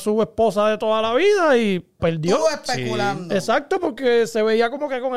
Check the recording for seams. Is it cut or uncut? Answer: cut